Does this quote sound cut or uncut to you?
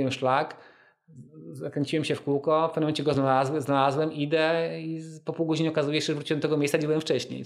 uncut